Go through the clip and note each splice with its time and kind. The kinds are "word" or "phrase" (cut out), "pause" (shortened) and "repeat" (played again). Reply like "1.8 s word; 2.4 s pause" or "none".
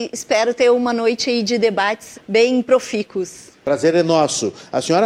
2.1 s word; 3.6 s pause